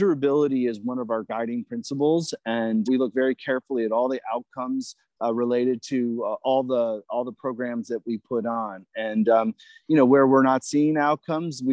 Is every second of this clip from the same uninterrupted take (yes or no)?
no